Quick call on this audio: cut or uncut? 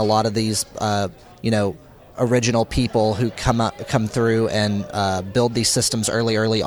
uncut